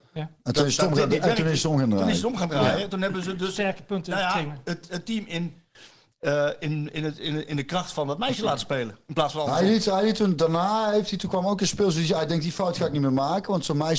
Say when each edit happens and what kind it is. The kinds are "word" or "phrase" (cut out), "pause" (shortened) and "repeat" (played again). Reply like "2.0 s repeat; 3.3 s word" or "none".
none